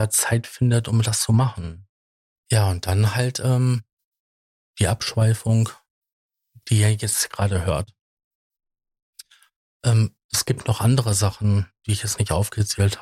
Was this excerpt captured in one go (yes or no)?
yes